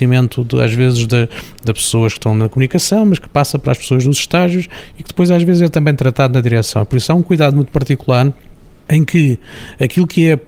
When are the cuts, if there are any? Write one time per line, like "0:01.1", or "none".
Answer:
none